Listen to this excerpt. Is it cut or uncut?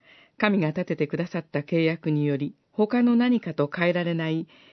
cut